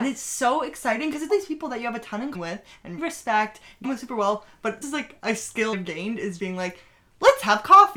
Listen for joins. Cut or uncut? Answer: cut